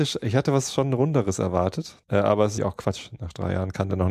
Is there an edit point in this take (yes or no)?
yes